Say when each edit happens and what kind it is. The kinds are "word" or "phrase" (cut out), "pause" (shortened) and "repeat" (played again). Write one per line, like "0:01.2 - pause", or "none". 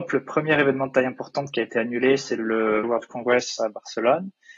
0:02.8 - word